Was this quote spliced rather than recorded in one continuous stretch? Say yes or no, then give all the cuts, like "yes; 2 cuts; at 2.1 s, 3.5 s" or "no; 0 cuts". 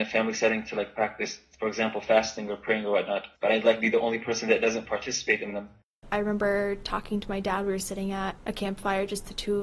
yes; 1 cut; at 3.3 s